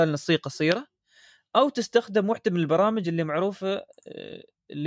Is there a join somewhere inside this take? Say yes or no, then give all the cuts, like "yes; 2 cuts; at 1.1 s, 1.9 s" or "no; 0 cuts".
no; 0 cuts